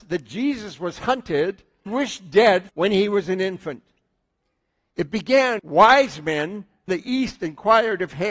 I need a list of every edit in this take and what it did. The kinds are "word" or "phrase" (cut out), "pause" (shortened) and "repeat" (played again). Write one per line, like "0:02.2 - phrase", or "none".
0:01.9 - word
0:02.7 - word
0:05.6 - word
0:06.9 - word